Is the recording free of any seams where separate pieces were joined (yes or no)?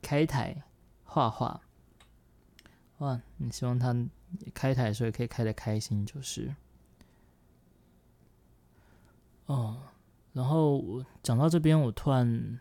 yes